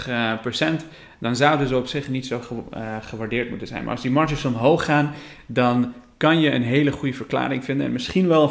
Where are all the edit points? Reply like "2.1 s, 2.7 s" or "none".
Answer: none